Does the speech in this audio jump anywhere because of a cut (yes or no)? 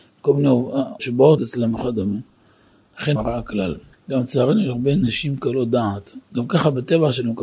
yes